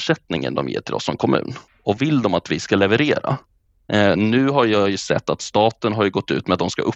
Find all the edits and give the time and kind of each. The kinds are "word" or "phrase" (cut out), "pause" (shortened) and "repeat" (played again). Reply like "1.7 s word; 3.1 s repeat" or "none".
2.0 s word

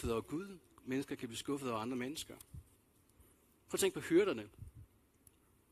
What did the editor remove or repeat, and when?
none

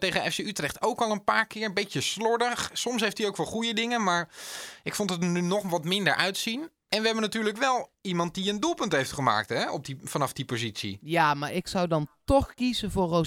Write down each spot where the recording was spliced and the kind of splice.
none

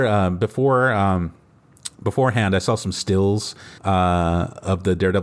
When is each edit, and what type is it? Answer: 1.9 s pause; 3.8 s pause

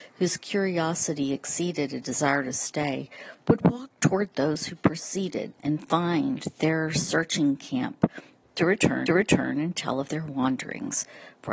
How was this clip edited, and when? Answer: 3.4 s pause; 5.6 s pause; 9.1 s repeat

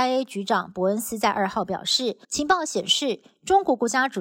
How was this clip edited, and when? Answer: 2.2 s pause

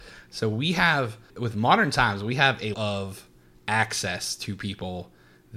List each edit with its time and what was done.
1.3 s word; 2.7 s word

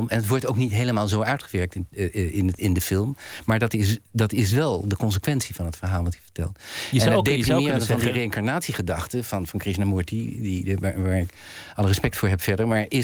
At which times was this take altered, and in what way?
2.6 s word

